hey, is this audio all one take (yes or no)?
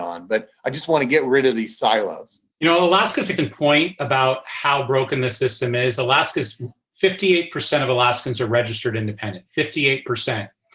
no